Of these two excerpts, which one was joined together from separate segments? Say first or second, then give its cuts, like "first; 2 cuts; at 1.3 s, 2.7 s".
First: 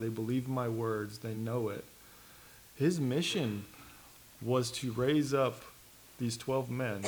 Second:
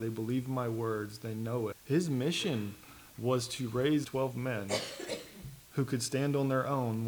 second; 4 cuts; at 1.7 s, 3.1 s, 4.0 s, 5.6 s